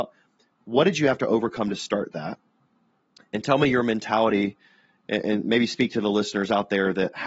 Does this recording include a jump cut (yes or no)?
no